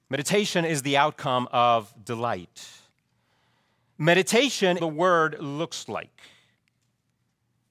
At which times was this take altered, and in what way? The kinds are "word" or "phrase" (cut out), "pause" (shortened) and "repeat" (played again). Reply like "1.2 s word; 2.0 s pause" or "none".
4.8 s phrase